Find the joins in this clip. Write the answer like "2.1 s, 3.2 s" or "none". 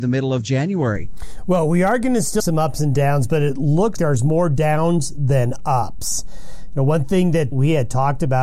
2.4 s, 4.0 s, 7.5 s